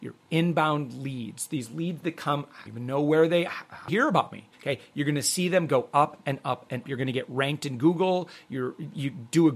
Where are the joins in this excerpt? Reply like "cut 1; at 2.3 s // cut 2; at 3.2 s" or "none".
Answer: cut 1; at 2.7 s // cut 2; at 3.9 s // cut 3; at 4.5 s // cut 4; at 6.8 s

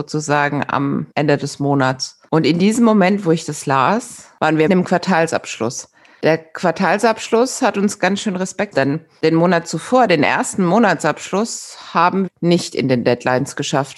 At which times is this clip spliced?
cut 1; at 1.1 s // cut 2; at 4.7 s // cut 3; at 8.7 s // cut 4; at 12.3 s

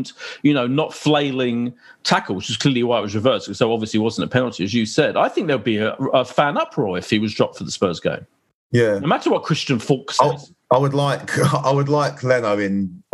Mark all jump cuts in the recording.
none

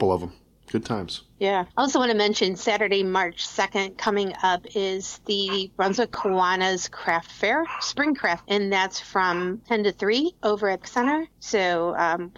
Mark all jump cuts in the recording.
cut 1; at 1.7 s // cut 2; at 8.4 s // cut 3; at 10.8 s

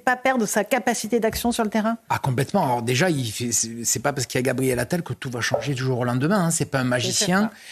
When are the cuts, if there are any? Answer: none

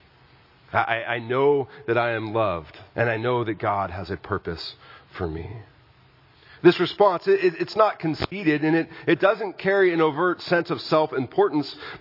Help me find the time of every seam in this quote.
cut 1; at 2.9 s

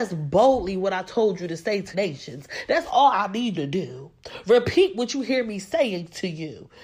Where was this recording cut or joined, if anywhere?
cut 1; at 1.9 s // cut 2; at 3.6 s

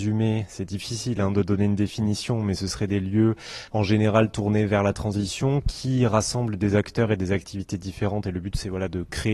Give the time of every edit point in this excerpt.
cut 1; at 3.7 s

